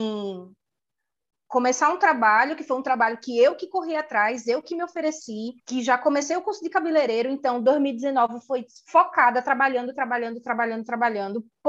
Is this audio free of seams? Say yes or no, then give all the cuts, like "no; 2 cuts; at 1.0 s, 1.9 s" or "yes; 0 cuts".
no; 1 cut; at 5.6 s